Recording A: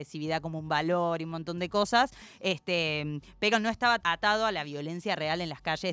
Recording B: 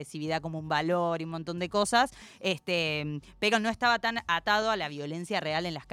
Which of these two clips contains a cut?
A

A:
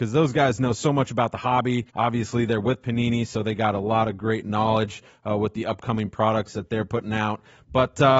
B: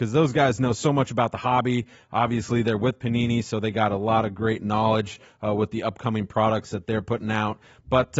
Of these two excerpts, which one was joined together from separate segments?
A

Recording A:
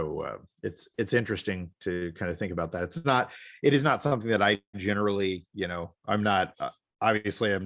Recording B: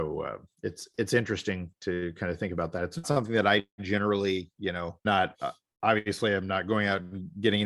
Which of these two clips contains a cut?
B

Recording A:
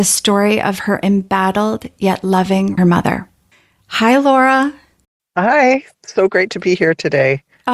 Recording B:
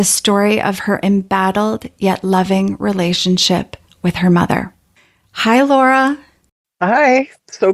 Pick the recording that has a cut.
A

